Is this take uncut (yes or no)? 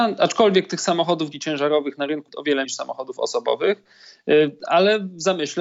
no